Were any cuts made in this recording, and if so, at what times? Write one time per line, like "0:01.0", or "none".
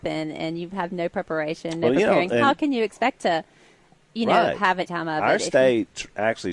0:04.9